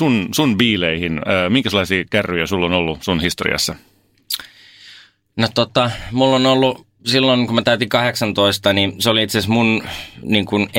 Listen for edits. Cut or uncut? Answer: uncut